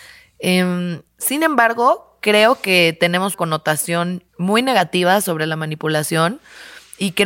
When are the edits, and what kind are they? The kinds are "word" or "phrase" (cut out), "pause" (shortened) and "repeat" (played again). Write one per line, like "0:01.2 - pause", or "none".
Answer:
0:01.1 - pause
0:03.3 - word
0:04.3 - pause